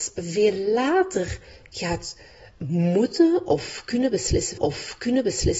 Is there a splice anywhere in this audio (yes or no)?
yes